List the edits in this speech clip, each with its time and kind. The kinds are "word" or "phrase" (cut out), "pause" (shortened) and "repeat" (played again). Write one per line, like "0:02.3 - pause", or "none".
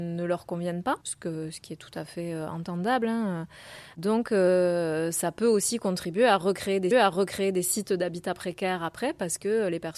0:01.0 - pause
0:06.9 - repeat